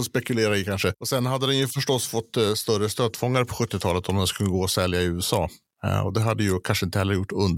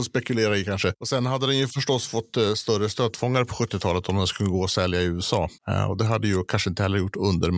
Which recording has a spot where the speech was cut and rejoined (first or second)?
second